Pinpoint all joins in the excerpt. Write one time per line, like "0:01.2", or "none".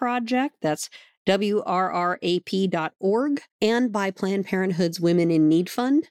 0:03.5